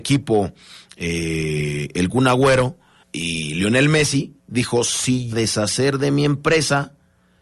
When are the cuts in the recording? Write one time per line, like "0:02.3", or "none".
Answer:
0:03.0
0:04.4
0:05.3